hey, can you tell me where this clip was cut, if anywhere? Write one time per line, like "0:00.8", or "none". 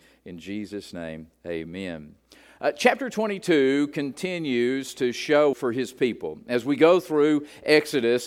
0:05.5